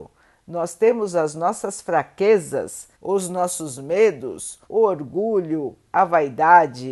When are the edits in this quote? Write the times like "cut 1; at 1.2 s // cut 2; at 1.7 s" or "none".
cut 1; at 2.9 s // cut 2; at 4.6 s